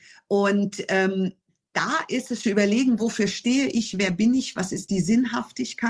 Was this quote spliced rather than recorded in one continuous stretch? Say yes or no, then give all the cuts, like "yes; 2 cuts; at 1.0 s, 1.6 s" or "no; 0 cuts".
yes; 1 cut; at 2.4 s